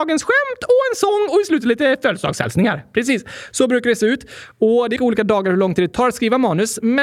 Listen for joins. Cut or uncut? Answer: cut